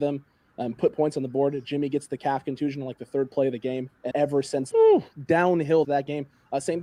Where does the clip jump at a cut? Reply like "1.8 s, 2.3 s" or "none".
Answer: 4.1 s, 4.7 s, 5.8 s